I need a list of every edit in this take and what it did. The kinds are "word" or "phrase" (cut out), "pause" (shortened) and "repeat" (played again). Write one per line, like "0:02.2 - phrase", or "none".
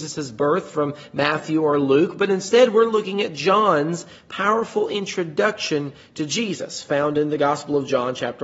none